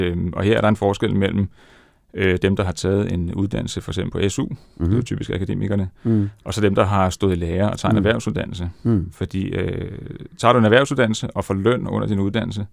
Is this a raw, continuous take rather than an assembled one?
yes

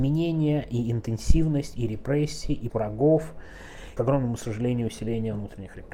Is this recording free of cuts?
no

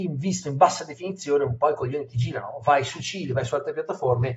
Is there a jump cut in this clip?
no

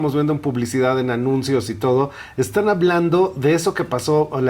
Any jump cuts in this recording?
no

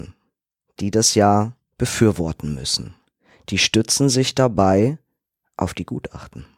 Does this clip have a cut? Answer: no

